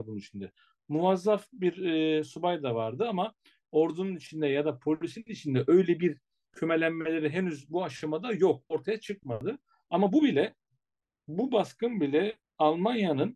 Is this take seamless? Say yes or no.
yes